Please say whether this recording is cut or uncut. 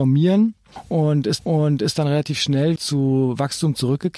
cut